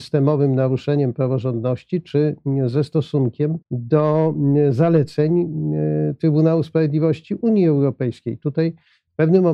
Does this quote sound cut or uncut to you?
cut